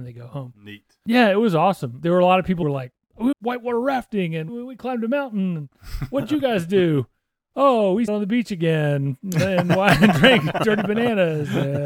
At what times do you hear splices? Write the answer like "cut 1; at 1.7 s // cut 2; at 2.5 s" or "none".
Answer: cut 1; at 2.0 s // cut 2; at 2.6 s // cut 3; at 3.3 s // cut 4; at 4.5 s // cut 5; at 8.1 s